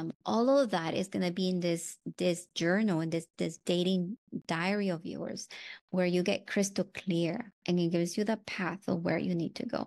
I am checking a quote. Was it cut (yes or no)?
yes